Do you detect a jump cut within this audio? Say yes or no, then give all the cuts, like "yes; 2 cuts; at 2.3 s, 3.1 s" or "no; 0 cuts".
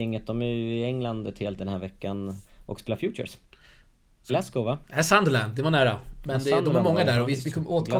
yes; 3 cuts; at 1.6 s, 4.3 s, 4.8 s